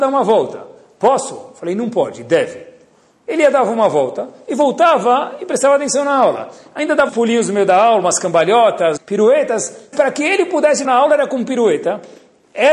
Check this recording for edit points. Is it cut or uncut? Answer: cut